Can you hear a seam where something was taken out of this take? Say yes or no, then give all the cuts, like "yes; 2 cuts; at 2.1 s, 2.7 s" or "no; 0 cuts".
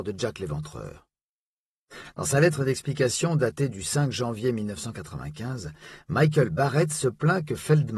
no; 0 cuts